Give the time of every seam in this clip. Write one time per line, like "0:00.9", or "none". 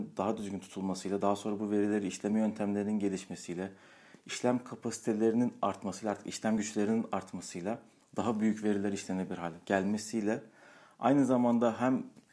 none